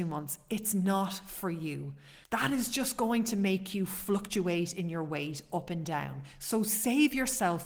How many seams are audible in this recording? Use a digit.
1